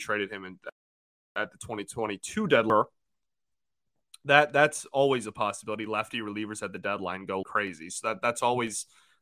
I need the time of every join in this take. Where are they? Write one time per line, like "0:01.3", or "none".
0:07.4